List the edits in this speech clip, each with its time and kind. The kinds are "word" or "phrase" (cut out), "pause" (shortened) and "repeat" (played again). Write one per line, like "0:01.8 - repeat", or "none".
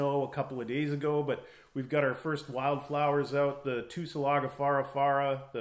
none